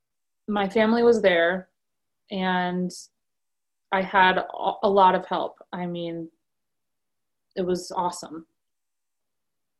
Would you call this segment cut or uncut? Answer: uncut